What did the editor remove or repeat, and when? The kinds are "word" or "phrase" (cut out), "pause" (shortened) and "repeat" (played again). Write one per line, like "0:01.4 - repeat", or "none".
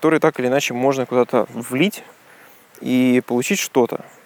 none